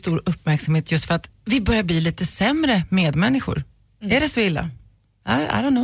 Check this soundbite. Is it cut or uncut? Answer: uncut